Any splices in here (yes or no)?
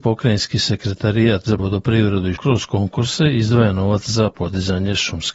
yes